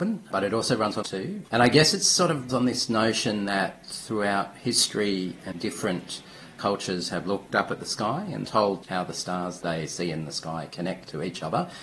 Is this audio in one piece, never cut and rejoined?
no; 8 cuts; at 1.0 s, 1.5 s, 2.5 s, 5.5 s, 7.5 s, 8.4 s, 8.9 s, 9.6 s

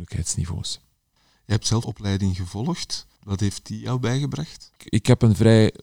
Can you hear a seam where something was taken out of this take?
yes; 1 cut; at 1.8 s

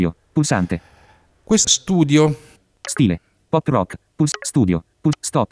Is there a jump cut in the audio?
yes; 1 cut; at 1.6 s

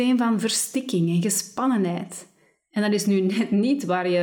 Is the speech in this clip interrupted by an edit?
no; 0 cuts

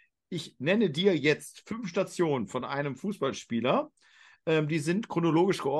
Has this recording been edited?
no; 0 cuts

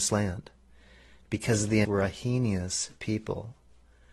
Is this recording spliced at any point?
yes; 1 cut; at 1.8 s

